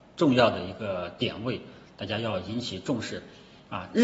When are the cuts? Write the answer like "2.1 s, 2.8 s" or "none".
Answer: none

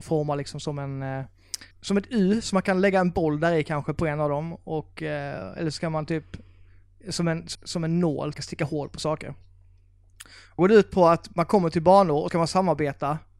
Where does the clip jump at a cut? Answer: 1.7 s, 7.5 s, 8.3 s, 10.6 s, 12.3 s

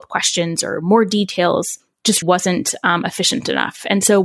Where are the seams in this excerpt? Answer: 2.2 s

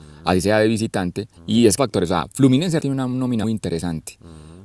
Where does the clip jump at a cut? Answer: 1.4 s, 1.8 s, 2.8 s, 3.4 s

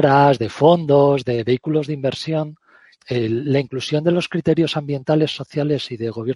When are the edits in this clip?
2.9 s

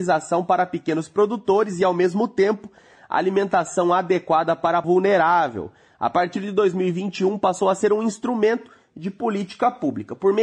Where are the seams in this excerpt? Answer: 4.8 s

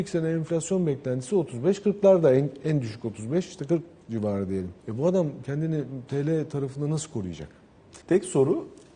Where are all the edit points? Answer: 4.8 s, 8.0 s

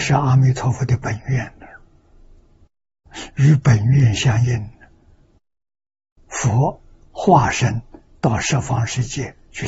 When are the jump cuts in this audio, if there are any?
none

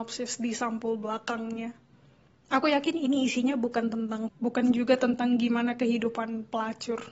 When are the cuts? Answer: 4.3 s

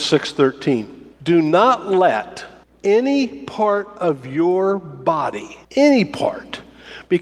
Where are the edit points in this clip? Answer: 1.1 s, 2.6 s, 5.6 s

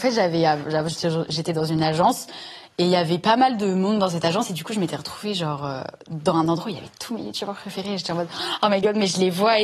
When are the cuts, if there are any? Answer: none

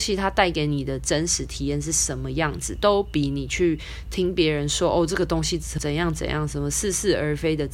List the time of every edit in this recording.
5.8 s

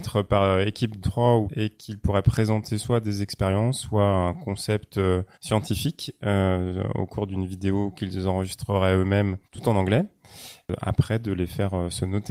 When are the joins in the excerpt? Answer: 1.0 s, 1.5 s, 5.3 s, 9.4 s

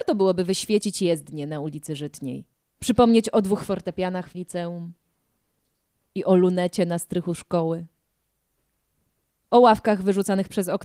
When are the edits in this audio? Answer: 2.5 s, 4.3 s

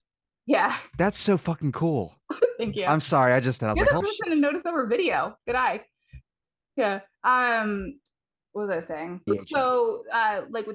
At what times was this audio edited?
3.6 s, 4.0 s, 9.3 s

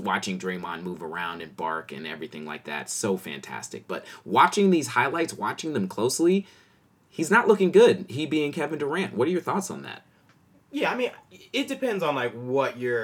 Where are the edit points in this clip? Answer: none

